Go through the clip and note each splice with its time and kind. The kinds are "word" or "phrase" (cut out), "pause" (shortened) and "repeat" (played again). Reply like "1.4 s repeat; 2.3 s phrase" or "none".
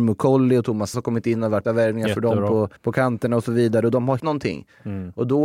0.9 s word; 1.6 s word; 2.8 s pause; 4.2 s word